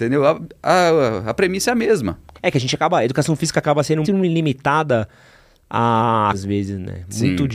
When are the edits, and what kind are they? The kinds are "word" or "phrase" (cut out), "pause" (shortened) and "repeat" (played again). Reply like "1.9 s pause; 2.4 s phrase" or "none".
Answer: 2.3 s pause; 4.0 s word; 6.3 s word